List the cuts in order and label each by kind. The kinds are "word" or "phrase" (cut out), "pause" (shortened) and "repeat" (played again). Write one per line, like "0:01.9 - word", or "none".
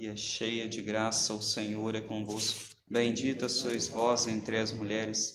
0:02.8 - pause